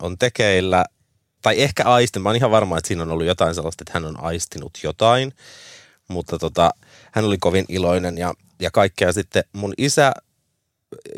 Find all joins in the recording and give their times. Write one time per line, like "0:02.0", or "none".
none